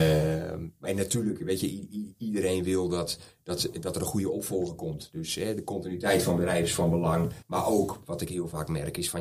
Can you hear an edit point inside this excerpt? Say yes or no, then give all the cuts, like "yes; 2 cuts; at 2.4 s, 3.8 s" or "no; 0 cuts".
yes; 1 cut; at 7.4 s